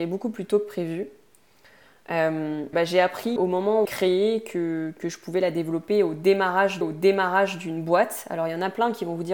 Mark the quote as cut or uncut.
cut